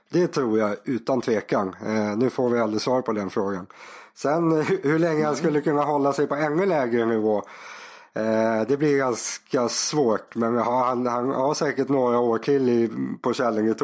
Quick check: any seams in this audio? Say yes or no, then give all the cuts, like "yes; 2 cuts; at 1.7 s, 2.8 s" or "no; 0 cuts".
no; 0 cuts